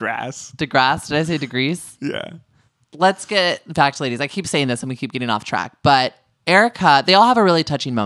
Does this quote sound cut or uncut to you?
uncut